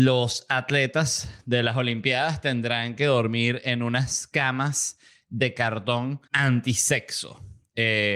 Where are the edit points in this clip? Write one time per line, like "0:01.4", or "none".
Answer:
0:06.3